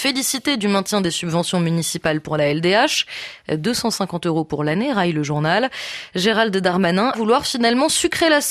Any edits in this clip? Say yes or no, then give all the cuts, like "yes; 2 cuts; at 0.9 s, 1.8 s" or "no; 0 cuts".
yes; 1 cut; at 7.1 s